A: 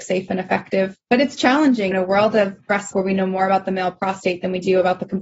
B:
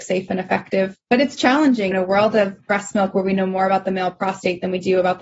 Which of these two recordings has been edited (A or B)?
A